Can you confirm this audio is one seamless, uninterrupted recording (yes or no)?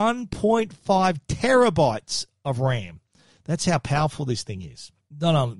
yes